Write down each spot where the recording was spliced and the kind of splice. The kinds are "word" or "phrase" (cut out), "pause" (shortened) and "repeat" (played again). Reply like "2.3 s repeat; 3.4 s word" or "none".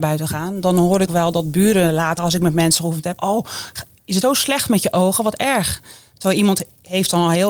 1.1 s word; 2.2 s word; 3.2 s word; 4.2 s word